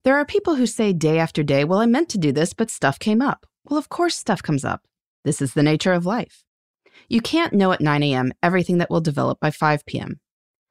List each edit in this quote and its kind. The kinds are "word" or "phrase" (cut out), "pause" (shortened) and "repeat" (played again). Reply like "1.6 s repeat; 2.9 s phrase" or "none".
none